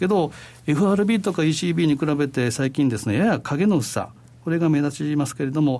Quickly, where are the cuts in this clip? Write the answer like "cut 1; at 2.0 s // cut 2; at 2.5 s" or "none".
none